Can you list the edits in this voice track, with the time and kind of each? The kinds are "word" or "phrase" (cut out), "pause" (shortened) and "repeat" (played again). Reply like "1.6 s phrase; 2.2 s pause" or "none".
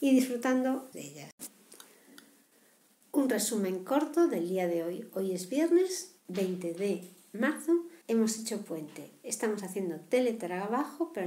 0.9 s phrase; 6.3 s word; 8.0 s pause

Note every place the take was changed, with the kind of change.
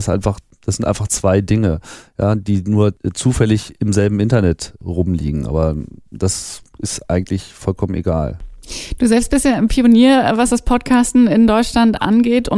none

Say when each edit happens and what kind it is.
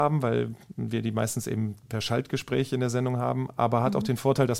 none

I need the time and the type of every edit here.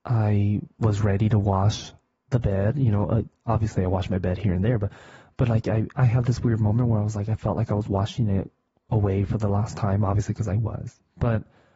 none

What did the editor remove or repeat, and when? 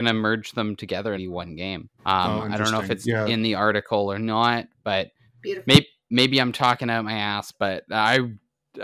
1.2 s phrase; 2.0 s pause; 5.3 s pause

